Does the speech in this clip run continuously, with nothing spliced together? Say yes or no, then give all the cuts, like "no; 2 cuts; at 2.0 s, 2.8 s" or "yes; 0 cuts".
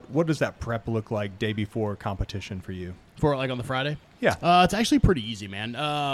yes; 0 cuts